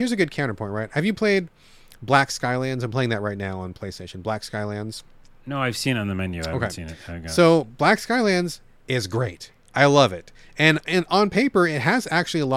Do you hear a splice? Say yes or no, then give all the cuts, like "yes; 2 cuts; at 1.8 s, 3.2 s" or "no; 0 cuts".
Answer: no; 0 cuts